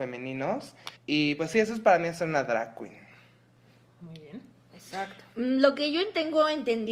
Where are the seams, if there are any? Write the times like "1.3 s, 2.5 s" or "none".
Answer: 1.0 s